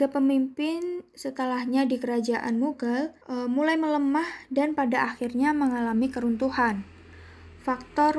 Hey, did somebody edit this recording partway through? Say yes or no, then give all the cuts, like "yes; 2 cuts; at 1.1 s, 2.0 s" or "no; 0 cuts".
yes; 1 cut; at 3.2 s